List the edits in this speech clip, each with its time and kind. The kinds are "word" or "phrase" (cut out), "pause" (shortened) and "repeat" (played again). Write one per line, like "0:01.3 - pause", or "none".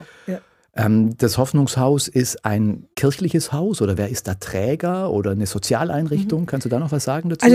0:02.9 - pause